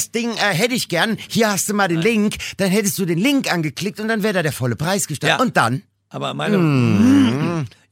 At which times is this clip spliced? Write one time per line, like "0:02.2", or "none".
none